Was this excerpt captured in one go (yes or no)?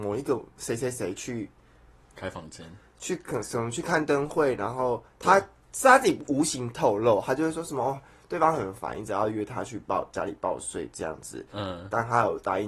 yes